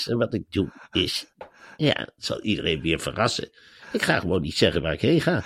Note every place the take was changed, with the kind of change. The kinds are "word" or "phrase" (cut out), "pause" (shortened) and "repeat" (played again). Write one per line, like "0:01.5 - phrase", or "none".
none